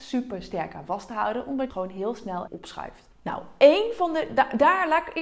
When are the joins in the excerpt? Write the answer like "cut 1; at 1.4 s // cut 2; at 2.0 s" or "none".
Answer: cut 1; at 1.7 s // cut 2; at 2.5 s // cut 3; at 3.1 s